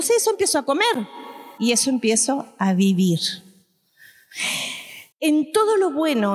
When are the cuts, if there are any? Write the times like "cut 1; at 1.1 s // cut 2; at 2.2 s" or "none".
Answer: cut 1; at 1.6 s // cut 2; at 5.1 s